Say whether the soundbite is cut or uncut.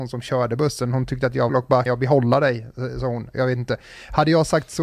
cut